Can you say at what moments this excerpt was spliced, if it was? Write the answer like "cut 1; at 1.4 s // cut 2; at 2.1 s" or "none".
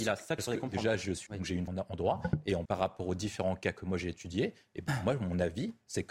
cut 1; at 1.3 s // cut 2; at 1.7 s // cut 3; at 2.7 s